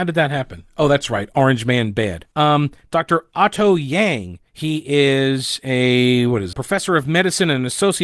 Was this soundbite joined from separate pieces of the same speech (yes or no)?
yes